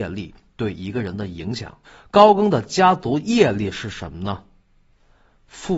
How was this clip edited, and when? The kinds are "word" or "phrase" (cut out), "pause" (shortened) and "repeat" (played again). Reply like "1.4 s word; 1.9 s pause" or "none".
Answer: 1.8 s pause